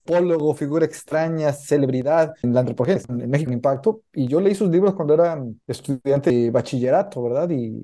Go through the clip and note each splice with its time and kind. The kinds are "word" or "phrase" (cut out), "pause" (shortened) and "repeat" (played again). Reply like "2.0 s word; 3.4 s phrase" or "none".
2.4 s word; 3.0 s phrase; 3.5 s phrase